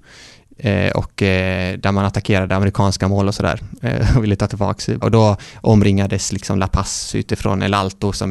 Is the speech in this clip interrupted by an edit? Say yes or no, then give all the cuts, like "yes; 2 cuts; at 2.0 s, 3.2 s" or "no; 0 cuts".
yes; 1 cut; at 5.0 s